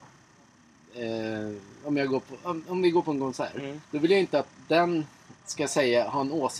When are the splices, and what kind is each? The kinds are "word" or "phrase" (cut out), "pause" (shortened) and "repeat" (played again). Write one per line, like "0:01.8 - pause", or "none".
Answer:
0:03.8 - pause
0:05.4 - pause